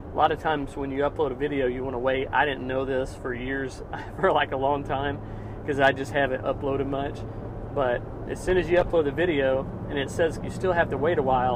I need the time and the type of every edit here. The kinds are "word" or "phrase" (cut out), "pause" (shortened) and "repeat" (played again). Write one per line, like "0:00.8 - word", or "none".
0:10.4 - word